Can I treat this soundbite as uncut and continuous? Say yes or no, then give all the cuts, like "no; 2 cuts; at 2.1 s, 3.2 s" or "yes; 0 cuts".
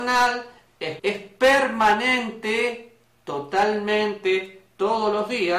no; 1 cut; at 1.0 s